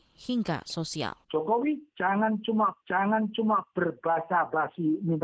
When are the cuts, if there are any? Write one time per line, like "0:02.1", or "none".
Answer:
0:01.2
0:02.8